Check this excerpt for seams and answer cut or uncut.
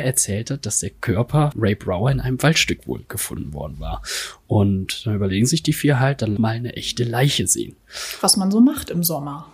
cut